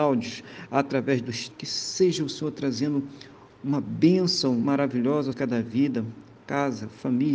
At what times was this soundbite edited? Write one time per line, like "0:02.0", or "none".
0:01.5
0:05.3